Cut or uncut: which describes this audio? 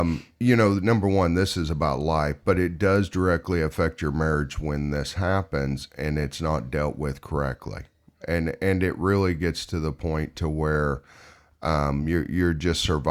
uncut